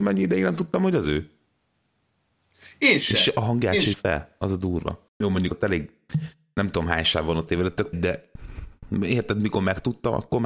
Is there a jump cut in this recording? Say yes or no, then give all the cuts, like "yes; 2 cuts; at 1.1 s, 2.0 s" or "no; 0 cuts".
yes; 5 cuts; at 3.9 s, 5.1 s, 5.5 s, 7.5 s, 7.9 s